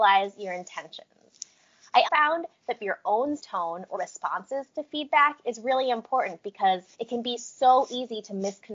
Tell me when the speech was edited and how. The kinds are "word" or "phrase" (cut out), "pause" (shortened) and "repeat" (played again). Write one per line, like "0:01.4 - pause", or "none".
0:02.0 - word
0:02.8 - phrase
0:03.4 - phrase
0:03.9 - phrase
0:06.9 - pause

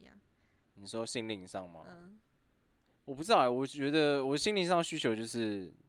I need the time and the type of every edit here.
none

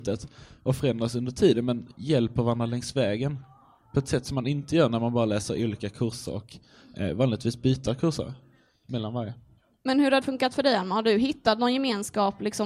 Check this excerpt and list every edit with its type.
0:10.2 - word

